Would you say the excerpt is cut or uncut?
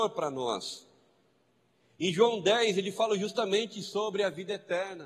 uncut